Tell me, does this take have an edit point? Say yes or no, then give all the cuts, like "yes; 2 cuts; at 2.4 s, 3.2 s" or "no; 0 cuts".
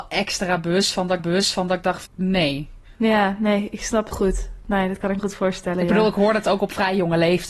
yes; 5 cuts; at 1.2 s, 2.1 s, 3.0 s, 4.1 s, 5.2 s